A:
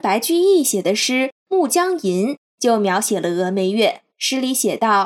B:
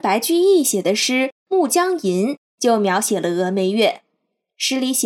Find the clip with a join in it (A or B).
A